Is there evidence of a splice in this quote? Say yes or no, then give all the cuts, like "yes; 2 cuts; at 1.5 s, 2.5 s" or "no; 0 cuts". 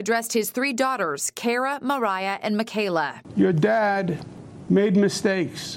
no; 0 cuts